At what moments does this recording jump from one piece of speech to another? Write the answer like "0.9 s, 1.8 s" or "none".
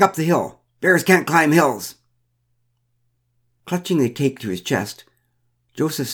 none